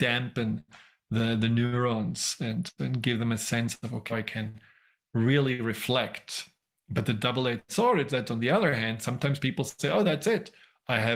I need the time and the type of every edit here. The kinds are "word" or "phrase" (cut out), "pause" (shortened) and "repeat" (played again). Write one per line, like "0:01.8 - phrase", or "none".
0:04.1 - word